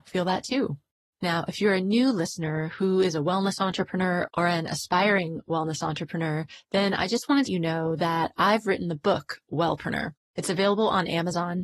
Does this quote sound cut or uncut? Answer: cut